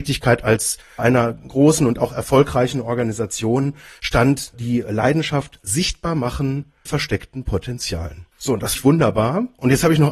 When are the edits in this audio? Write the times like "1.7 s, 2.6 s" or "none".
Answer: 1.0 s, 4.5 s, 6.9 s, 8.3 s, 8.7 s